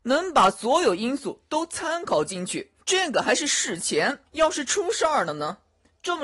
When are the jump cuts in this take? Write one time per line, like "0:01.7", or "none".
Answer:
0:02.8
0:04.3